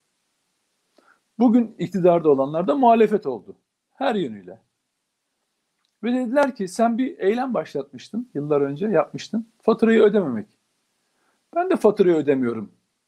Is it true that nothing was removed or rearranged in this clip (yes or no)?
yes